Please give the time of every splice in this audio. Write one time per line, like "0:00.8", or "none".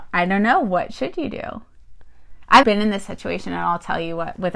0:02.6